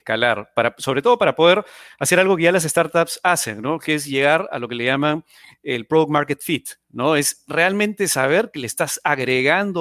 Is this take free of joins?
yes; 0 cuts

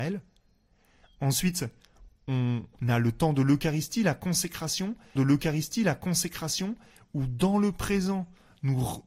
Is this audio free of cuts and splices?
no; 1 cut; at 5.2 s

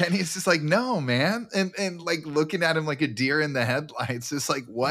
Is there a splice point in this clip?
no; 0 cuts

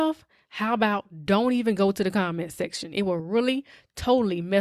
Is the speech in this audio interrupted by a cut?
no; 0 cuts

